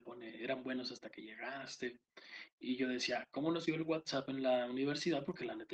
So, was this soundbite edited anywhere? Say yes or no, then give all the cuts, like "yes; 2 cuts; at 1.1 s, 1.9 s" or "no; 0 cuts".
yes; 1 cut; at 3.7 s